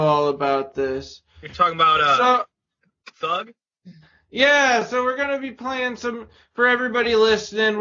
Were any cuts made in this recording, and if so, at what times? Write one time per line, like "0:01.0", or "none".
none